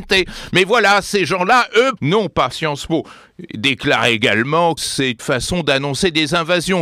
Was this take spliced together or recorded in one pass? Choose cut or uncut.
cut